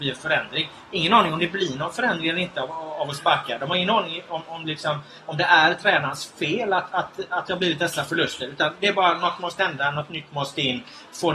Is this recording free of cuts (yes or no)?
yes